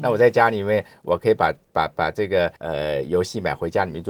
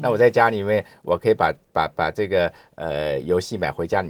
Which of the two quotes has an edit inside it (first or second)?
first